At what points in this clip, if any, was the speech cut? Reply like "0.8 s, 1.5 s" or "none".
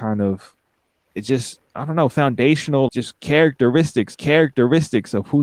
1.7 s, 2.9 s, 4.1 s